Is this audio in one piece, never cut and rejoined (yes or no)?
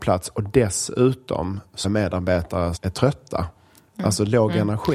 no